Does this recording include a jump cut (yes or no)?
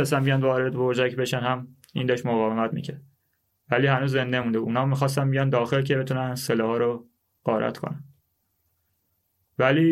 no